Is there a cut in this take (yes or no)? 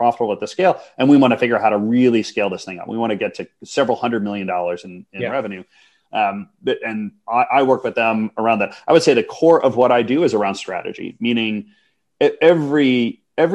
no